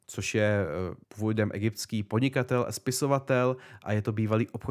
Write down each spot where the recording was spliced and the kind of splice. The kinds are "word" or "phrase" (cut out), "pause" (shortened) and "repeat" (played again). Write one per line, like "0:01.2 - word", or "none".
0:01.0 - pause